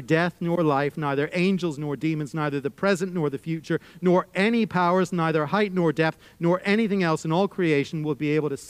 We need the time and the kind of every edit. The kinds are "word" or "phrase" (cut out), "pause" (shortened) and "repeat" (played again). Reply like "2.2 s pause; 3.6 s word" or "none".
none